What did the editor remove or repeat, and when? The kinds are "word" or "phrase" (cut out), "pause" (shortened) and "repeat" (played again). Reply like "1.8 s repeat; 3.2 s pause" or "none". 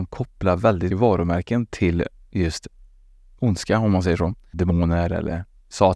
0.9 s word